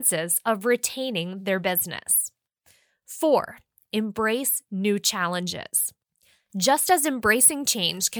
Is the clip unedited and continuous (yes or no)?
yes